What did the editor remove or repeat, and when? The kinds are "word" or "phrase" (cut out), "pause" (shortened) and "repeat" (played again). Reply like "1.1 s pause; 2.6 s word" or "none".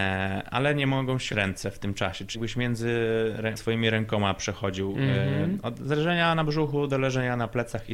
1.3 s word; 2.3 s word; 3.6 s word